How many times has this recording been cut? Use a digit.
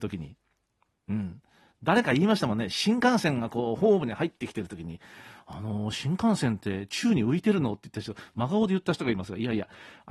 0